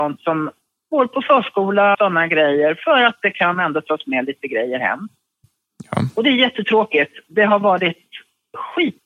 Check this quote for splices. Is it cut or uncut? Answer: cut